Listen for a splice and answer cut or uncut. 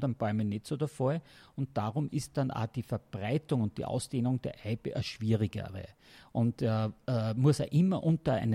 uncut